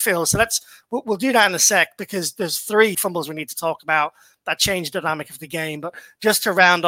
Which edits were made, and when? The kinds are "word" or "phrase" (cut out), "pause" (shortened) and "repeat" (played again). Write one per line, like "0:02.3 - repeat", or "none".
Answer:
0:02.9 - word